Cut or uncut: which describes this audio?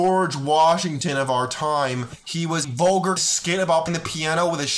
cut